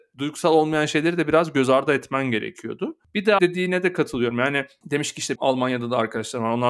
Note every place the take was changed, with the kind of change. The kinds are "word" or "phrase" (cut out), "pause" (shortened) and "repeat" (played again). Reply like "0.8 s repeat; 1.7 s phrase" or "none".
3.4 s word; 5.4 s word